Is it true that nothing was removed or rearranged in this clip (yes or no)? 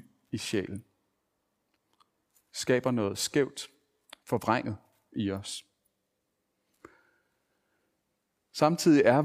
yes